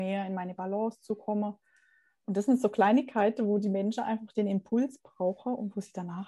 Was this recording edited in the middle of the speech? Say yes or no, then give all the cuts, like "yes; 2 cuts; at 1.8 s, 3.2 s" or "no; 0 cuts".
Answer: no; 0 cuts